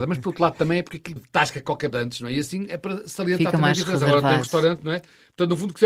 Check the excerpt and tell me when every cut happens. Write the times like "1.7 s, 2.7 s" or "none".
1.2 s, 1.9 s